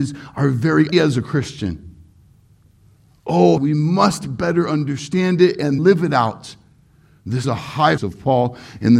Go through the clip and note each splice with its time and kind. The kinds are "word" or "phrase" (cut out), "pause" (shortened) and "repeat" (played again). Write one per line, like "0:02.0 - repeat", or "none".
0:00.9 - word
0:03.6 - word
0:05.8 - word
0:07.4 - word
0:08.0 - word